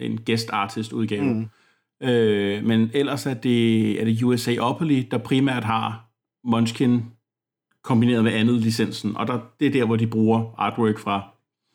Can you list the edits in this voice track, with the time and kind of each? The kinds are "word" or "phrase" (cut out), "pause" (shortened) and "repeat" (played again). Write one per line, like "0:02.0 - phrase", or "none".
none

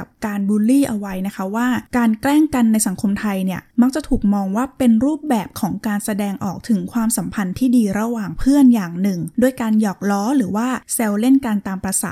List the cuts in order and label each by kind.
none

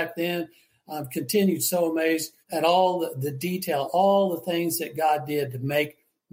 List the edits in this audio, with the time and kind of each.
0:02.4 - pause

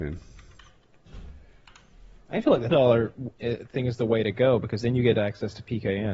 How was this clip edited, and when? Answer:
0:02.7 - word

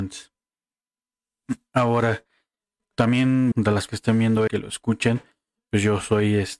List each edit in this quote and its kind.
0:03.5 - word
0:03.9 - word
0:04.5 - word

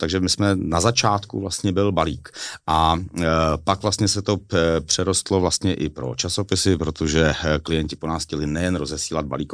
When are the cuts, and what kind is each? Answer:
none

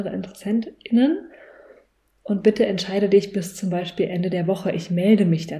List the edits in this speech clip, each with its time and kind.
none

